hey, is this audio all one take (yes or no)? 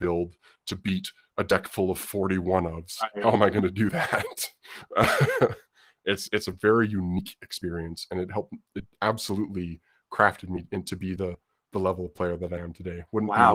yes